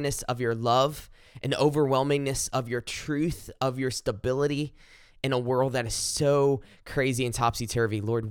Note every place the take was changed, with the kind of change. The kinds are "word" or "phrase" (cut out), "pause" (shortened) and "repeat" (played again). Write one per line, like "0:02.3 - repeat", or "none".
none